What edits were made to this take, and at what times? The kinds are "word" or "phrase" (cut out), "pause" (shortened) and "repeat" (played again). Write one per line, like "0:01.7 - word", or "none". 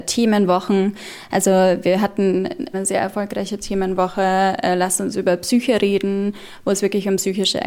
0:02.7 - phrase